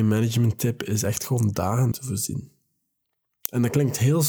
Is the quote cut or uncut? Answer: cut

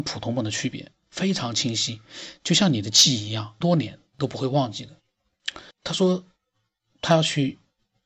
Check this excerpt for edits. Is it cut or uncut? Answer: cut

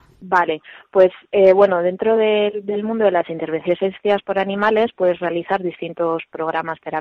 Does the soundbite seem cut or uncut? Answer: uncut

